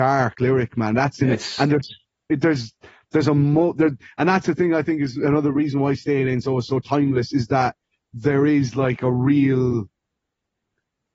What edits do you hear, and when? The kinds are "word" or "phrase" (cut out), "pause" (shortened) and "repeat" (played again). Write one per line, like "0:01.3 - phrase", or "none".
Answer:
none